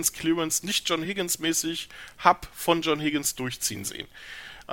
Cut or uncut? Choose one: uncut